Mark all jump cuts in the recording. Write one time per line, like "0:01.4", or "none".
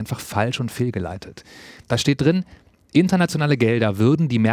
none